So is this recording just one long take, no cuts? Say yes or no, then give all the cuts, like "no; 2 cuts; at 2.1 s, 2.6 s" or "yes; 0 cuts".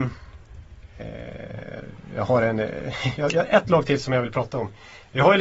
yes; 0 cuts